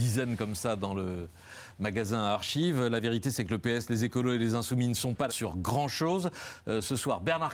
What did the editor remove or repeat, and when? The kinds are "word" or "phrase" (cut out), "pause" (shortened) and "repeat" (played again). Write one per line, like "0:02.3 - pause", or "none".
0:05.3 - word